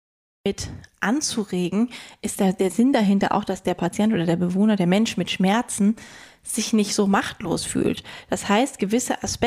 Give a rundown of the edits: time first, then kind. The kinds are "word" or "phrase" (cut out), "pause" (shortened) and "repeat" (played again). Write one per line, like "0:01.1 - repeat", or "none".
none